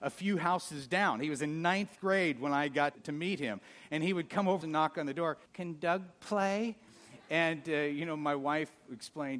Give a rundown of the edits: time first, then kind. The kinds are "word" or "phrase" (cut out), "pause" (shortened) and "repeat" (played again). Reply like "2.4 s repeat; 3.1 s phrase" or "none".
2.9 s word; 4.6 s phrase; 5.5 s pause